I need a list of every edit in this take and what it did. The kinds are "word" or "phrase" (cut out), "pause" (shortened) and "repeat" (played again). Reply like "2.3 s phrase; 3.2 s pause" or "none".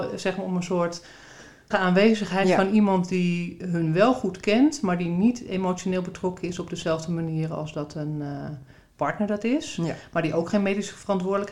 1.7 s word